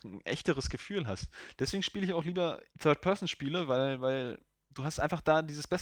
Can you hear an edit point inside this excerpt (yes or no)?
yes